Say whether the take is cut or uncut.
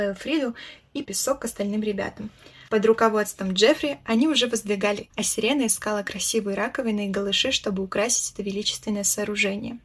cut